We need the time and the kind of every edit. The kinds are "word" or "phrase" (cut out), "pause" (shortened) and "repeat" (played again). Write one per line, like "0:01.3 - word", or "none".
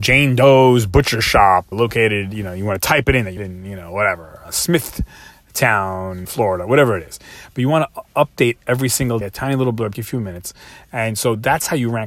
0:01.7 - word
0:03.4 - word
0:04.4 - word
0:06.2 - word
0:09.2 - word
0:09.9 - word